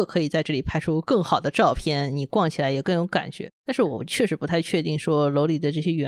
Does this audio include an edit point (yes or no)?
yes